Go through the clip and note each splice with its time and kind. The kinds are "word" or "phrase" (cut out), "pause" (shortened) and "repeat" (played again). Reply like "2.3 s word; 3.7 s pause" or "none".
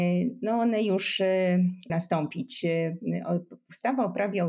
1.9 s word